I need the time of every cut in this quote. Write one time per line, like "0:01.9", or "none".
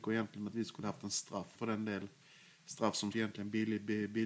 0:01.5
0:03.1